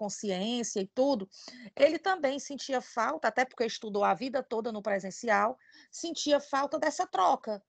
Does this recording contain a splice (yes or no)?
no